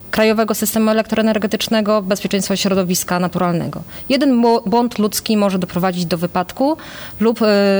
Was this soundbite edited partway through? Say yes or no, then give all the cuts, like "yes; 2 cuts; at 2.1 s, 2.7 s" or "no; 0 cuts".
no; 0 cuts